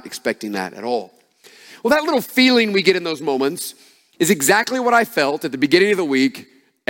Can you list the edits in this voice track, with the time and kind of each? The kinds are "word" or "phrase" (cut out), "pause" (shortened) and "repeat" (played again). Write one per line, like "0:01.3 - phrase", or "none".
none